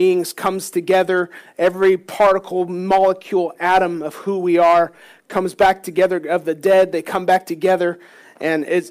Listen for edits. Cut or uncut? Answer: uncut